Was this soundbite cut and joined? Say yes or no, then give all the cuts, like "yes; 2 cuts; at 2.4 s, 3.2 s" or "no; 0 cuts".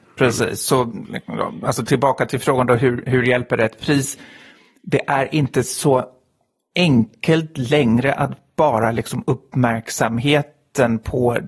no; 0 cuts